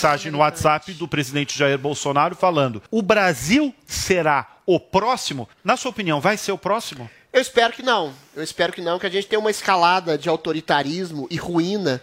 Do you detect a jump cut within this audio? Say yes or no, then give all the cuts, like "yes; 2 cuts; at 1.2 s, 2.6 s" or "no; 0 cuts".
yes; 2 cuts; at 2.9 s, 5.5 s